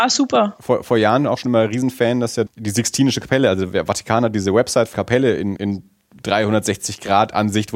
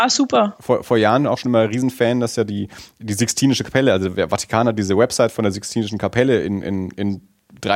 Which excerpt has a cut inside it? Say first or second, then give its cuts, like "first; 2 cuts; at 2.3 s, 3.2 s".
first; 3 cuts; at 2.5 s, 4.9 s, 5.6 s